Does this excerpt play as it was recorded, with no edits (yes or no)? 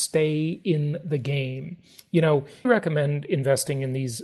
no